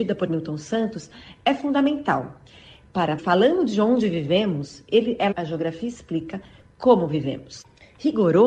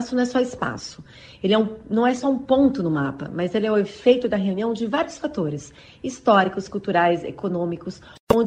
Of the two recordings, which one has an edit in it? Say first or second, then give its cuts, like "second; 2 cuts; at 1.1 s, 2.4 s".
first; 2 cuts; at 3.2 s, 5.3 s